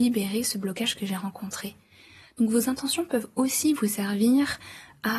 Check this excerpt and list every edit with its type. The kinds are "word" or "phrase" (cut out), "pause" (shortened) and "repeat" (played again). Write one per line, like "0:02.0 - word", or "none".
none